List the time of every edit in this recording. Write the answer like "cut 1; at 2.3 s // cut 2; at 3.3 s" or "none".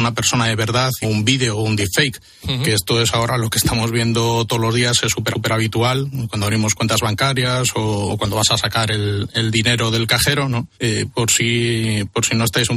cut 1; at 1.0 s // cut 2; at 5.3 s // cut 3; at 10.7 s